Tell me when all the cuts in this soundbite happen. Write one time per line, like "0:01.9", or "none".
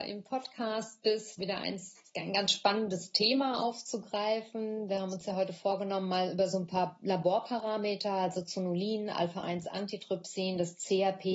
0:01.4